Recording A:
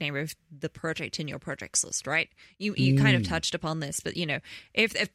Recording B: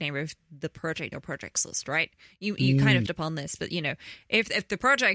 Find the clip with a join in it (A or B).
B